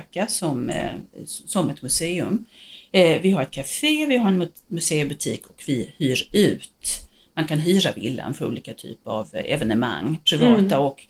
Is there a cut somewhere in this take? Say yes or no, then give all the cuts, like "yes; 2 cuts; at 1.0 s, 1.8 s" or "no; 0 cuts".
no; 0 cuts